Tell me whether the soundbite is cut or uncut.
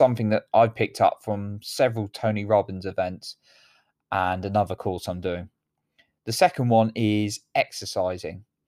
uncut